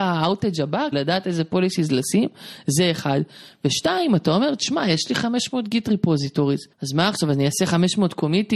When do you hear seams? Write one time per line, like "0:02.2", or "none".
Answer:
0:00.9
0:06.7